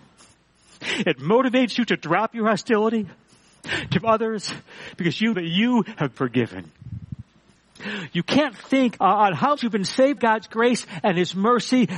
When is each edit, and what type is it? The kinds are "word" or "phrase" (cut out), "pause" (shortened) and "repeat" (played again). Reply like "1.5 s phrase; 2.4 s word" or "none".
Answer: 4.0 s word; 5.3 s word; 6.1 s word; 9.0 s word; 9.6 s word; 10.2 s word